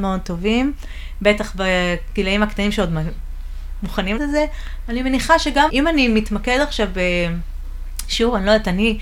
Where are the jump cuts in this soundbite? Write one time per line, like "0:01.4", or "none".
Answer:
0:04.2
0:05.7